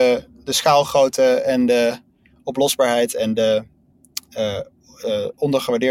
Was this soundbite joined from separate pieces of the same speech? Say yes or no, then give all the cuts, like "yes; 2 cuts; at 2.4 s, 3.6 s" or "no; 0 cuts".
no; 0 cuts